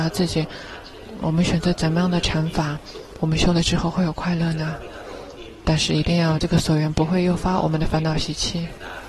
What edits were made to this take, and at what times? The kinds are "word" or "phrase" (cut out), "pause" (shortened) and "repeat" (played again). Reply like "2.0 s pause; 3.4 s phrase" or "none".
1.2 s word